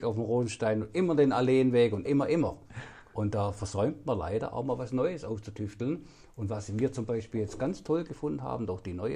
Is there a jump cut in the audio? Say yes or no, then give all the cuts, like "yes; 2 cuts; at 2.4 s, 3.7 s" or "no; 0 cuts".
yes; 1 cut; at 2.1 s